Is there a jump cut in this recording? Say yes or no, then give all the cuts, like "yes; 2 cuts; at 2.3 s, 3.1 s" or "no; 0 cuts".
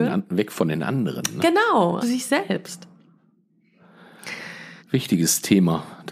yes; 2 cuts; at 2.0 s, 4.8 s